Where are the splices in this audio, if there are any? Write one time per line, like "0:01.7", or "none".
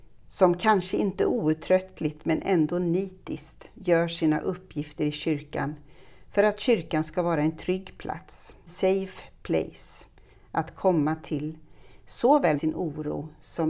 0:08.7
0:12.6